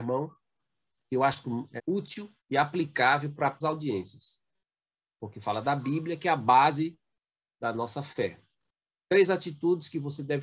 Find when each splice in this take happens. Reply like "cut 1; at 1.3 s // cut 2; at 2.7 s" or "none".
cut 1; at 1.8 s // cut 2; at 2.4 s // cut 3; at 3.6 s